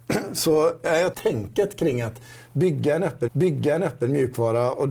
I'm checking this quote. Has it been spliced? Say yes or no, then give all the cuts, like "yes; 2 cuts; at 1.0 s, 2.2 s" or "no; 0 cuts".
yes; 2 cuts; at 1.1 s, 3.3 s